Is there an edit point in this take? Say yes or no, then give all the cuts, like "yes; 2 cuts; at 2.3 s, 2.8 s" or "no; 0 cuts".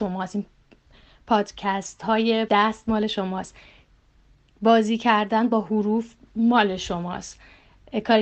yes; 1 cut; at 2.5 s